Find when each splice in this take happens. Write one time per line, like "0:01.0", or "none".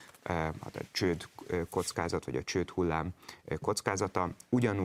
none